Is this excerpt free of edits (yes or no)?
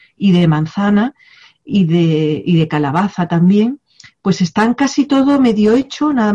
yes